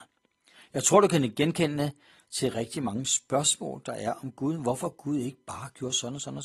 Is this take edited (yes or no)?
no